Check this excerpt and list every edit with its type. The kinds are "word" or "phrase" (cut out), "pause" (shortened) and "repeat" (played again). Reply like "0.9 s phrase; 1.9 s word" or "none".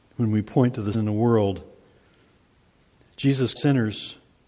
0.9 s word; 3.6 s word